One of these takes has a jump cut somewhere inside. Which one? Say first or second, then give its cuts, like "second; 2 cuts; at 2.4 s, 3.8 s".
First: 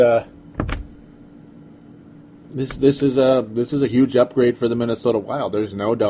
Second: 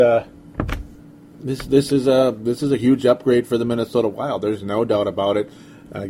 second; 1 cut; at 1.0 s